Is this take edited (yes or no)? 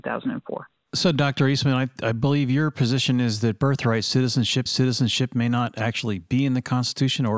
yes